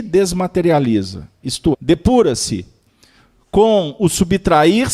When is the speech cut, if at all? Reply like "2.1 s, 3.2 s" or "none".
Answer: 1.7 s